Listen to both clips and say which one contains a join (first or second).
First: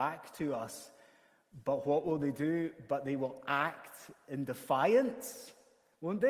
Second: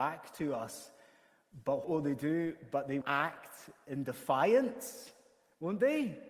second